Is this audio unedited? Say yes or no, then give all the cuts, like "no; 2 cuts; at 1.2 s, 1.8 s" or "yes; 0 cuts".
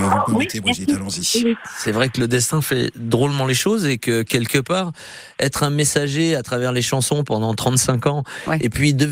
yes; 0 cuts